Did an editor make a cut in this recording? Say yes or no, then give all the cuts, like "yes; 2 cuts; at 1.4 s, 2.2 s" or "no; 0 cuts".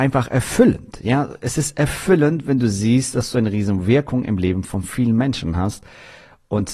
no; 0 cuts